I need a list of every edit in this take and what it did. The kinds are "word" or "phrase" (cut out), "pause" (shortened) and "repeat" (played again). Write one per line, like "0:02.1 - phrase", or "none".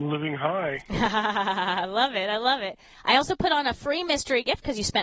none